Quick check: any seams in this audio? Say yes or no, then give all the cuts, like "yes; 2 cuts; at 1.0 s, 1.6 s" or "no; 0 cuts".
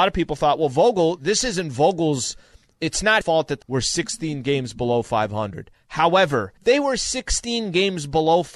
yes; 3 cuts; at 3.2 s, 3.6 s, 6.6 s